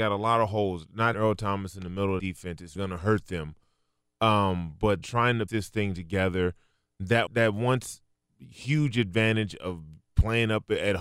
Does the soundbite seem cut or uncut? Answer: cut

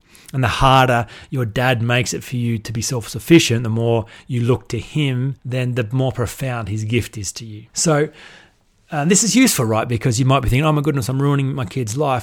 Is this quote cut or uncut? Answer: cut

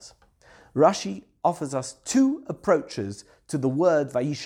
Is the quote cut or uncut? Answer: uncut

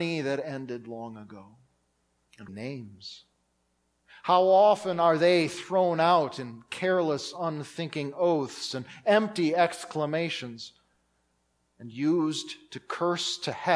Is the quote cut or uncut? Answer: cut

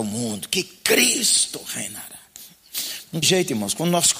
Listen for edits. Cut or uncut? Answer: cut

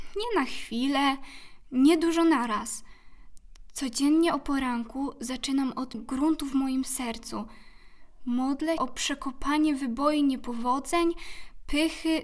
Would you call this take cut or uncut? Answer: cut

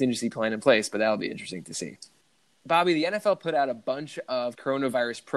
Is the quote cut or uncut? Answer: uncut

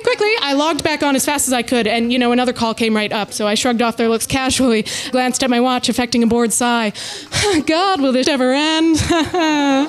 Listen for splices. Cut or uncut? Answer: cut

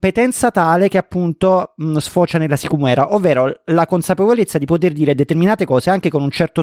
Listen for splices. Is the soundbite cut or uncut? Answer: uncut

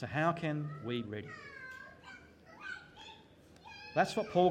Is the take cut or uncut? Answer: cut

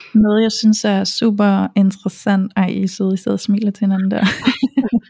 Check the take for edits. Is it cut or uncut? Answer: uncut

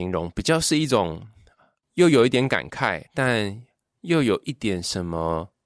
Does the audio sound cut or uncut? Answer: cut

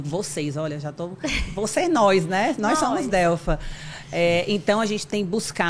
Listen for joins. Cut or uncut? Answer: uncut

